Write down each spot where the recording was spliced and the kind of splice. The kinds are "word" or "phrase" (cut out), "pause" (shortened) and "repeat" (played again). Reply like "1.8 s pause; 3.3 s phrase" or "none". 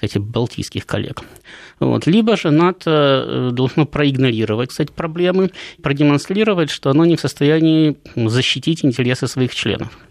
4.7 s word; 5.8 s word